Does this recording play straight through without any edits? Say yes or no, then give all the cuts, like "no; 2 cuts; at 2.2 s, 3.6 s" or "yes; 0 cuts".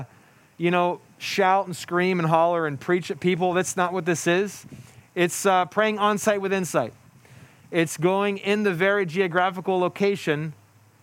yes; 0 cuts